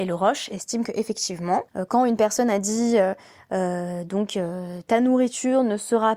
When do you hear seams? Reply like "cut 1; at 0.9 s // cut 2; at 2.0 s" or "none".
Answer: cut 1; at 1.7 s